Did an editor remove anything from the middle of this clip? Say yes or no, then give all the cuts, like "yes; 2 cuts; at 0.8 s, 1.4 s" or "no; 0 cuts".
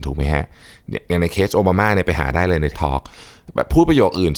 yes; 1 cut; at 2.7 s